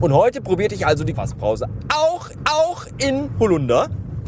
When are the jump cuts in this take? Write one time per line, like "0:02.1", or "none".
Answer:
0:01.1
0:02.4